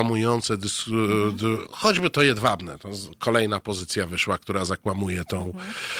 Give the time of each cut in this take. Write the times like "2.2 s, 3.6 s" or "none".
none